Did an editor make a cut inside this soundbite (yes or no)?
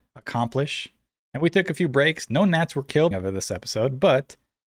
yes